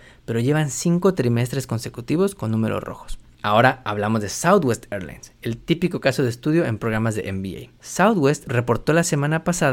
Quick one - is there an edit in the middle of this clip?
no; 0 cuts

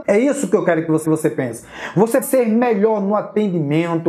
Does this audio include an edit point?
yes; 2 cuts; at 1.0 s, 2.2 s

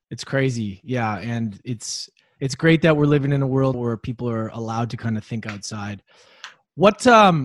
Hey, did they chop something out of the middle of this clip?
yes; 1 cut; at 3.7 s

